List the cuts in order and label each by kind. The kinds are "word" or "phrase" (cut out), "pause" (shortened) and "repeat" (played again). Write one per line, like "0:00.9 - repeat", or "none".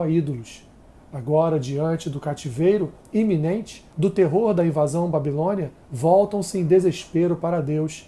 0:03.9 - pause
0:05.8 - pause